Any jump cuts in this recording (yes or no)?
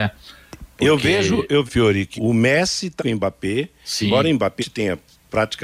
yes